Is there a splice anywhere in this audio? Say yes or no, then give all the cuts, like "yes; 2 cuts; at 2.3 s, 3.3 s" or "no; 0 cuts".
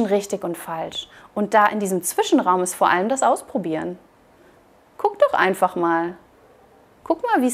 no; 0 cuts